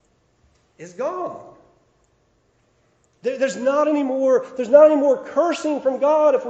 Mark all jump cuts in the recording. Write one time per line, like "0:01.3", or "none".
none